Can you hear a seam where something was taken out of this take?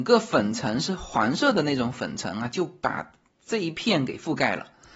no; 0 cuts

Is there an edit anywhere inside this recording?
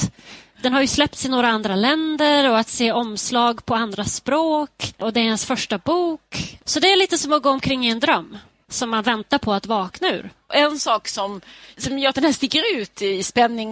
no; 0 cuts

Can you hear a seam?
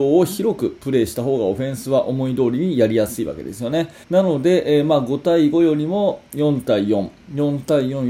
yes; 1 cut; at 4.0 s

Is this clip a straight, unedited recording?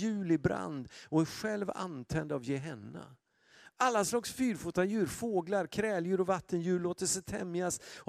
yes; 0 cuts

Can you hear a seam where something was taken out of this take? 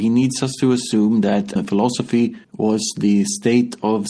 yes; 2 cuts; at 1.6 s, 2.4 s

